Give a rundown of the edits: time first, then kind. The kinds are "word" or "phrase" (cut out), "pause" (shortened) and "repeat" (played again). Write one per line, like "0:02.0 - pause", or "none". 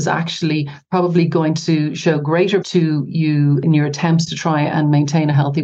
0:02.6 - word